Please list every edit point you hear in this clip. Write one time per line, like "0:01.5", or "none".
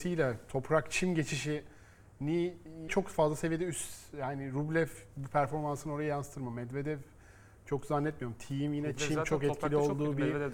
0:02.9